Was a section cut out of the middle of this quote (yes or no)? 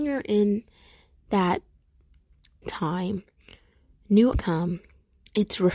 yes